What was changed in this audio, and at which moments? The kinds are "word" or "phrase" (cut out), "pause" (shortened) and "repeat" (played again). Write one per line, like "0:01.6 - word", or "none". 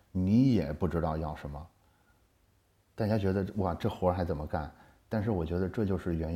none